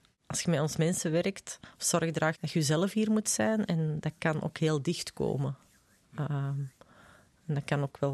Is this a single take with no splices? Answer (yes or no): yes